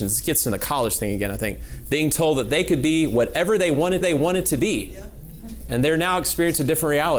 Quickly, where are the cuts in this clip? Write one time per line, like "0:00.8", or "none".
0:04.0

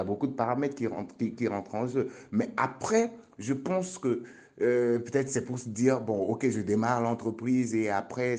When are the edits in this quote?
none

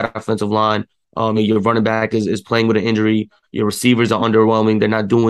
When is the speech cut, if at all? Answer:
0:01.4

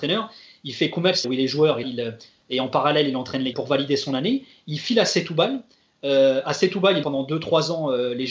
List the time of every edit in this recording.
0:01.2
0:01.8
0:03.5
0:07.0

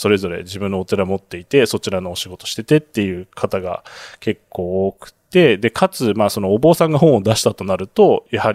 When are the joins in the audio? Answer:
none

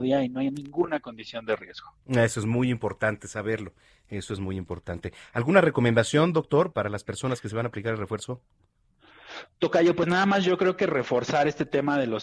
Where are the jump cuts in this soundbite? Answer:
0:02.0
0:06.7

